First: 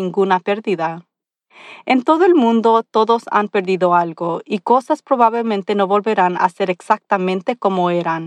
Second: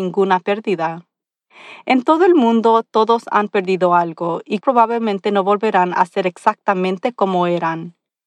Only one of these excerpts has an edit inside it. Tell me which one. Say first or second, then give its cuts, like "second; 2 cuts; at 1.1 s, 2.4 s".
second; 1 cut; at 4.6 s